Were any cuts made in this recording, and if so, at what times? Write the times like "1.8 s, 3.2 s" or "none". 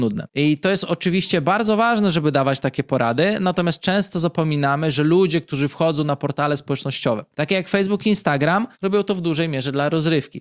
7.3 s, 8.7 s

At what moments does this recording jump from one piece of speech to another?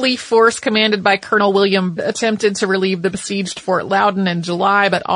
2.0 s

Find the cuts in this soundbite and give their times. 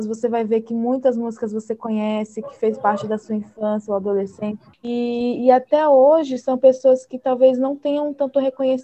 4.7 s

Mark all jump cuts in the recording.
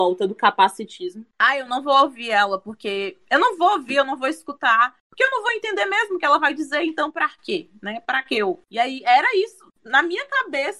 5.0 s

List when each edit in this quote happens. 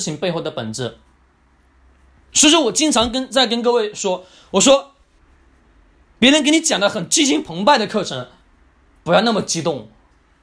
none

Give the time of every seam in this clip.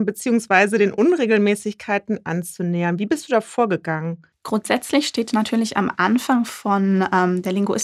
4.3 s

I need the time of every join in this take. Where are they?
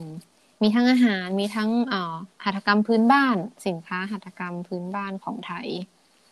2.3 s

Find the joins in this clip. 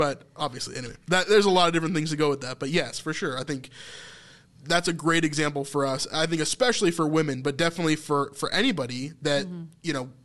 none

